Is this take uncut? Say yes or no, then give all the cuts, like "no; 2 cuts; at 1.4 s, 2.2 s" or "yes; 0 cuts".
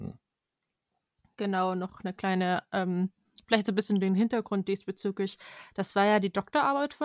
yes; 0 cuts